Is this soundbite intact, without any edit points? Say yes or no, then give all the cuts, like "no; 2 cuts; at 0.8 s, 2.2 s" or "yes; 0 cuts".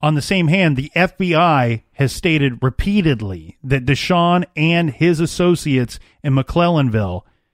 yes; 0 cuts